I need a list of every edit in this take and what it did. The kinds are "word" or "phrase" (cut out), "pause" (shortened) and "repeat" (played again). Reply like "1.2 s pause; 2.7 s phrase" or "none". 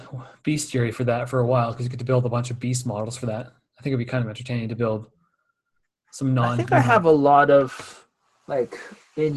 none